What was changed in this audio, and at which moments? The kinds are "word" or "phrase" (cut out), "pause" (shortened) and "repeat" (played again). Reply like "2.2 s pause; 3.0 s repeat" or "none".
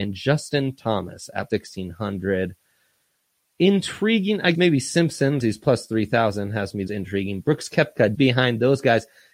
1.5 s word; 4.5 s word; 5.4 s word; 6.9 s word; 8.1 s word